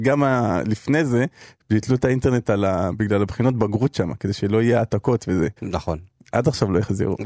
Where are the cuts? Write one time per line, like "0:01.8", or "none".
0:05.6

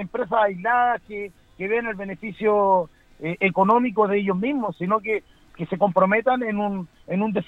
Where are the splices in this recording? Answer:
none

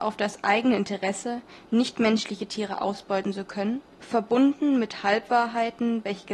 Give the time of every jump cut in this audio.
0:03.9

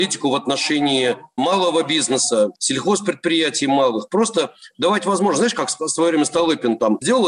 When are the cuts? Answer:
0:02.6

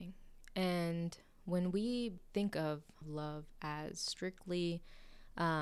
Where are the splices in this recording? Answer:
none

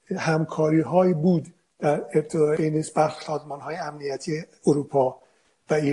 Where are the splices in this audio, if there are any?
0:02.6
0:03.2

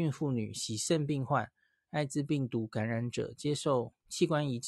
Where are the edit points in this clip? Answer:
none

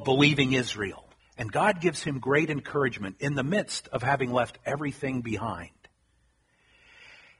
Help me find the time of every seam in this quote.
0:01.2

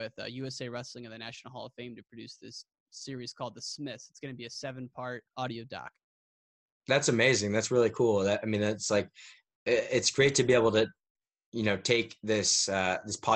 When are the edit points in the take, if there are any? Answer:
0:05.3

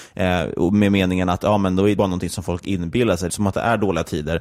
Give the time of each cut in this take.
0:02.0
0:03.3

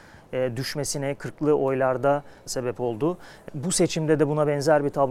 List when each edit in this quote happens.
0:02.5
0:03.5

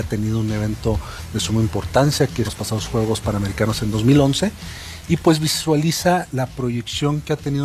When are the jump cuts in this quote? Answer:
0:02.5

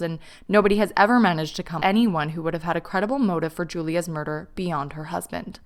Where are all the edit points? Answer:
0:01.8

